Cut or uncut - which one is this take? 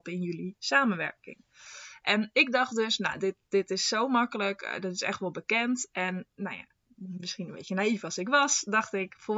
cut